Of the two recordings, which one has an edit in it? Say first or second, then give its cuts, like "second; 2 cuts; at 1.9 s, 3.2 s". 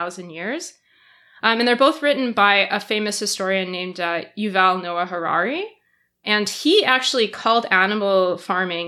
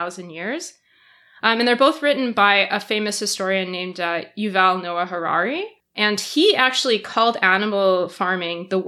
second; 1 cut; at 5.8 s